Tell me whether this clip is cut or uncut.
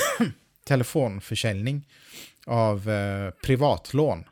uncut